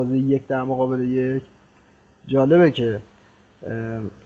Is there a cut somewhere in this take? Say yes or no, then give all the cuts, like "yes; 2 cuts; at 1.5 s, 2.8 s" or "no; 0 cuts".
no; 0 cuts